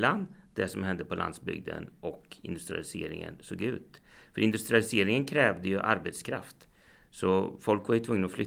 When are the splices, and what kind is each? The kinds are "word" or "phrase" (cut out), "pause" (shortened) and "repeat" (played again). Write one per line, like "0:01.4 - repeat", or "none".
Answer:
none